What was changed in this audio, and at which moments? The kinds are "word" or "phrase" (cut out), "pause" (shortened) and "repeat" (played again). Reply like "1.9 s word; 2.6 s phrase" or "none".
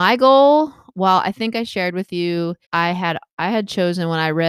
2.6 s pause